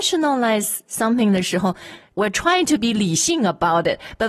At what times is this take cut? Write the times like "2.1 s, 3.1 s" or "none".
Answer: none